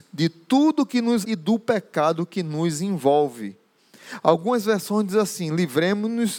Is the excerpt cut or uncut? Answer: cut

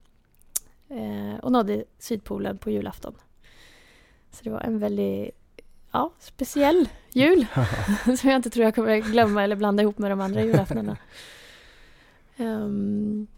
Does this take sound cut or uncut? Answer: uncut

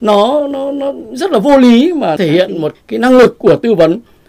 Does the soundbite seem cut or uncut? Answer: cut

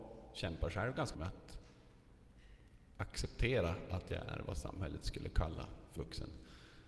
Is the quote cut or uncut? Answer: cut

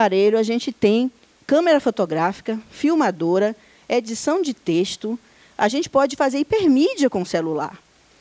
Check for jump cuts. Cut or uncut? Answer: uncut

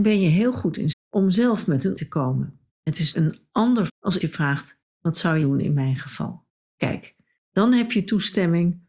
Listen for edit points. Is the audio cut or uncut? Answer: cut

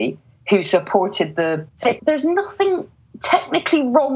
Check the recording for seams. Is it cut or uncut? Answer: cut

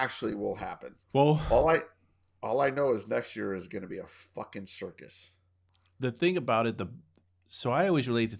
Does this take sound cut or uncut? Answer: cut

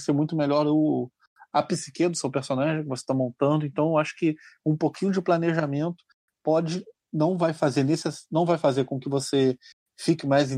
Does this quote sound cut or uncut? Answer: uncut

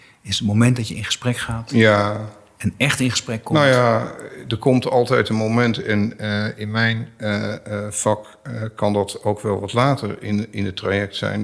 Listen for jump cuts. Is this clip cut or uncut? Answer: uncut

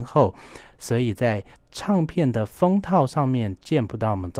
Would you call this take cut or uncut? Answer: cut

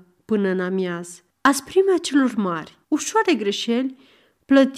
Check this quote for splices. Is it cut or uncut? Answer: cut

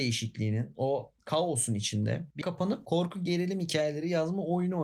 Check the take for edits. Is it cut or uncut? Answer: cut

